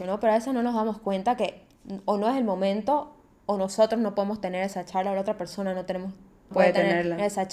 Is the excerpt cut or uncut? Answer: cut